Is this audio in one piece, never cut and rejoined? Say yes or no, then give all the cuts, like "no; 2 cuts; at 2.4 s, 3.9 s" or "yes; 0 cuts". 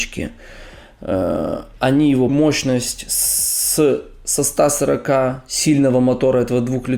no; 1 cut; at 2.3 s